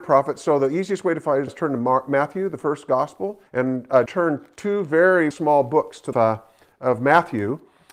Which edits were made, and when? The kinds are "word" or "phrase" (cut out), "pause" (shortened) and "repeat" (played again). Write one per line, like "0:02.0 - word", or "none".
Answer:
0:01.5 - word
0:03.5 - pause
0:04.1 - word
0:05.3 - word
0:06.1 - phrase